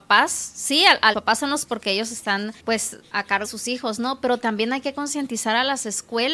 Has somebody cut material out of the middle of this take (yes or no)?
yes